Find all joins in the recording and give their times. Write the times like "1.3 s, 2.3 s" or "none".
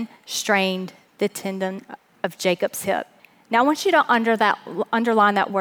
3.2 s